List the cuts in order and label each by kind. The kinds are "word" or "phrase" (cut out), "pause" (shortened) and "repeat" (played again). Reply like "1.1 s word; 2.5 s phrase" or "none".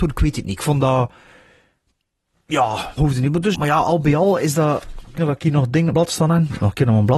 3.0 s word; 3.5 s word; 5.2 s word; 5.9 s word